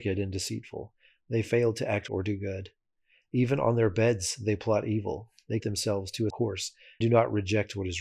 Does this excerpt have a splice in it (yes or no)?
yes